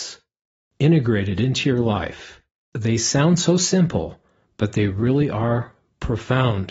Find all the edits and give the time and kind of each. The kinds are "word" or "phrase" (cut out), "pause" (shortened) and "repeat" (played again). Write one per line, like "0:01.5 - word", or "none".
none